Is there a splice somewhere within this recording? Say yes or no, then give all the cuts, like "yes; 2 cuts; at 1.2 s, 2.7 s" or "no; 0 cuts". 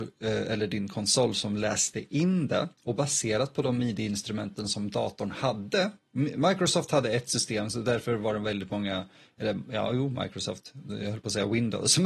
no; 0 cuts